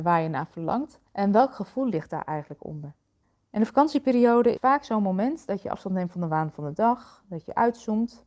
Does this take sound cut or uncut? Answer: cut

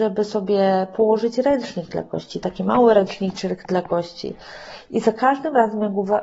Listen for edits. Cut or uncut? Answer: uncut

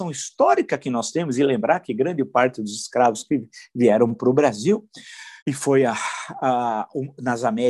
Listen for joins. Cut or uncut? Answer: cut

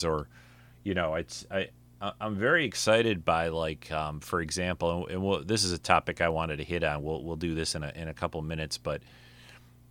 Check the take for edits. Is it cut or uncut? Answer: uncut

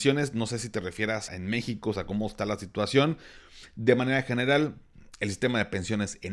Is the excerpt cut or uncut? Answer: cut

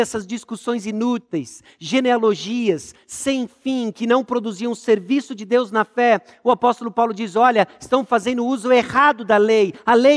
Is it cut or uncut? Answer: uncut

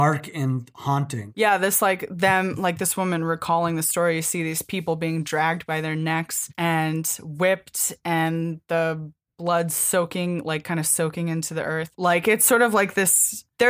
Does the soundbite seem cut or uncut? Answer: uncut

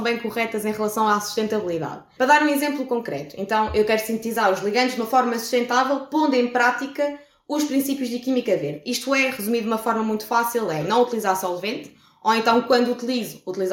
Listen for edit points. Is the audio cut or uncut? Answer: uncut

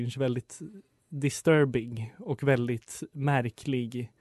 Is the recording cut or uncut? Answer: uncut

